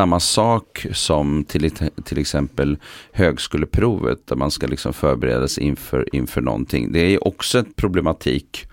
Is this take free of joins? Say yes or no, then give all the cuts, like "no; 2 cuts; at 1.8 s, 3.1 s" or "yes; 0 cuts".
yes; 0 cuts